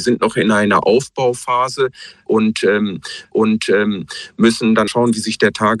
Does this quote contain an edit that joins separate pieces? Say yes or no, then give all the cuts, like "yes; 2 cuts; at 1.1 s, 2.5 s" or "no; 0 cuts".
yes; 2 cuts; at 3.2 s, 4.9 s